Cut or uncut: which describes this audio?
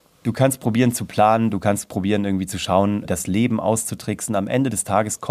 cut